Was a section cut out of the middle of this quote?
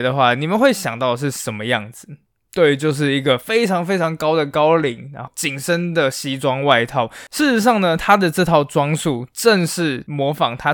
no; 0 cuts

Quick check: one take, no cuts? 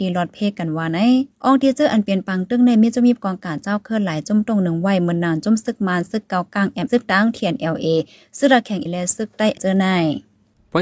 no; 3 cuts; at 6.9 s, 8.9 s, 9.6 s

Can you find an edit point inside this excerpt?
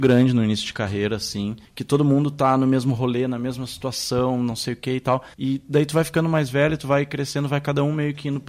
yes; 2 cuts; at 1.6 s, 5.3 s

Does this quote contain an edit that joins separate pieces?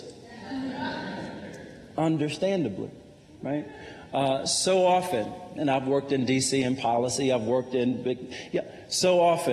no; 0 cuts

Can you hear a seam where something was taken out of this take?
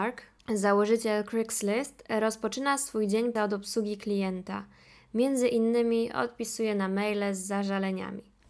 yes; 1 cut; at 3.4 s

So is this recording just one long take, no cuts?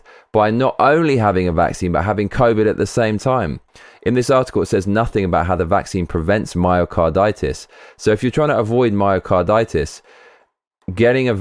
yes; 0 cuts

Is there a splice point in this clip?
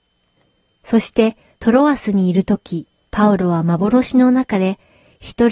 no; 0 cuts

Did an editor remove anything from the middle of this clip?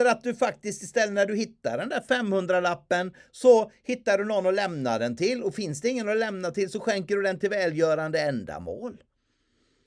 no; 0 cuts

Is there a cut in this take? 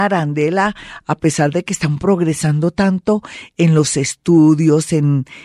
no; 0 cuts

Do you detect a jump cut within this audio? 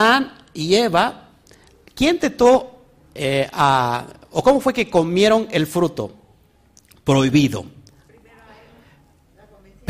no; 0 cuts

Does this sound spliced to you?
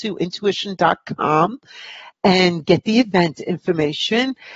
no; 0 cuts

